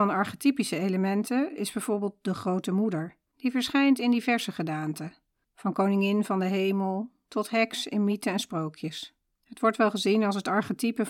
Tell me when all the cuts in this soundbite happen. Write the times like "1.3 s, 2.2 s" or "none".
3.3 s, 5.4 s, 9.3 s